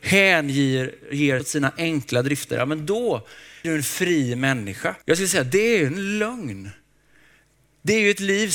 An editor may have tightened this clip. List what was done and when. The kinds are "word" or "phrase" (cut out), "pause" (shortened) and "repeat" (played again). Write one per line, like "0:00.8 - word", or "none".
0:01.4 - word
0:03.6 - word
0:05.0 - pause